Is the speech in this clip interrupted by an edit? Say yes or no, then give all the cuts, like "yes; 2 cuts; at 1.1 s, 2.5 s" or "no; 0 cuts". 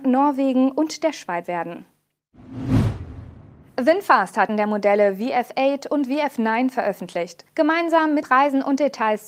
yes; 4 cuts; at 1.4 s, 4.5 s, 7.5 s, 8.2 s